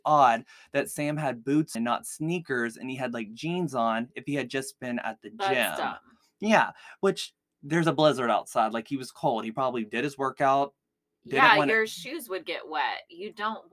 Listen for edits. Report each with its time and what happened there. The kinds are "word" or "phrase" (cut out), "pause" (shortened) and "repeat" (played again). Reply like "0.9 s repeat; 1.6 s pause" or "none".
1.7 s word